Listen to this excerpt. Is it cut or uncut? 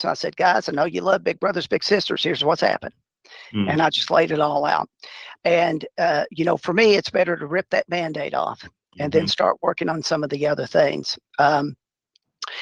uncut